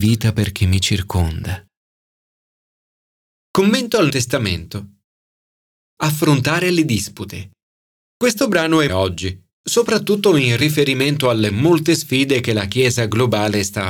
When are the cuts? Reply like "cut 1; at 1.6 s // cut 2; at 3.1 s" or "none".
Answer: cut 1; at 4.1 s // cut 2; at 7.9 s // cut 3; at 8.9 s